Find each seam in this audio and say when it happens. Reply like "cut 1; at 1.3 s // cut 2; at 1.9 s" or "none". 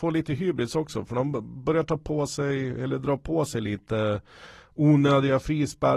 none